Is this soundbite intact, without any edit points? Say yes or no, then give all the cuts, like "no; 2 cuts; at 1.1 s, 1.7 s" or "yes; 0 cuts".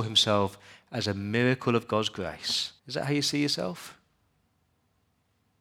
no; 1 cut; at 2.8 s